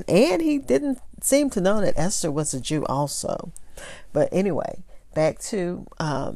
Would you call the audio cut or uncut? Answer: uncut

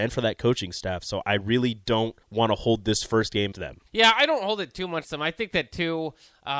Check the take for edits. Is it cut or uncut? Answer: cut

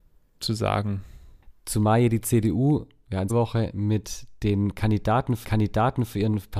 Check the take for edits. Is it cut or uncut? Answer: cut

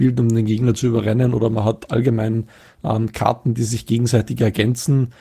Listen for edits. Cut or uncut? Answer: uncut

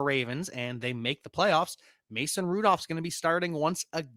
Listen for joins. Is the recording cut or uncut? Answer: uncut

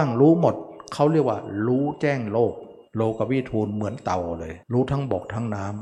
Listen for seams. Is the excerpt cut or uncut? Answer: cut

